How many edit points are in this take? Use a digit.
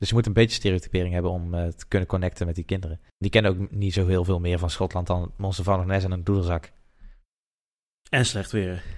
1